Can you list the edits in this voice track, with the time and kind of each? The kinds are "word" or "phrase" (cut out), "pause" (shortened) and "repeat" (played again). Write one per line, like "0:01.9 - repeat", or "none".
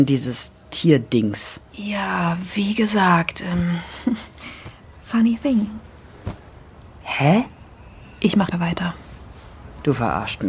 0:01.6 - pause
0:08.5 - phrase